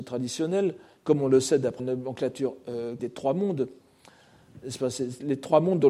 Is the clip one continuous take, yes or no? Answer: no